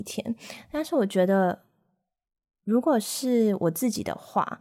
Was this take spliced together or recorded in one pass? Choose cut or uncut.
uncut